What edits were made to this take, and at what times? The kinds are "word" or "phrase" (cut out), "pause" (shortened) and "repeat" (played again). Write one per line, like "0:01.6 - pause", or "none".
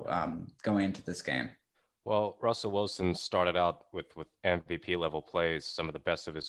0:01.7 - pause